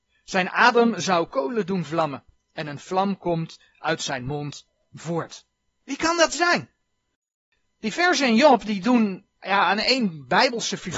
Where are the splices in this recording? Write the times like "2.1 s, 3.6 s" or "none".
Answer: none